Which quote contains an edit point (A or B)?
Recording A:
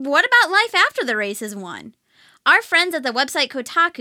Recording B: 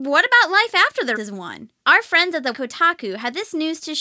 B